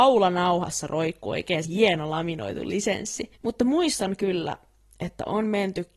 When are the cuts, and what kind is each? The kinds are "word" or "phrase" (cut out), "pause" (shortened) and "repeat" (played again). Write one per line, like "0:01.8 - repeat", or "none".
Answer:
0:01.6 - word
0:03.4 - pause